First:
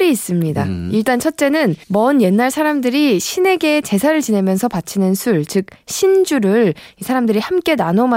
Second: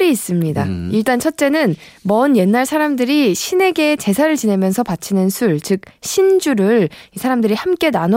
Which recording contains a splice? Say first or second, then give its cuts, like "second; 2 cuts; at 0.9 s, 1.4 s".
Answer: first; 1 cut; at 1.8 s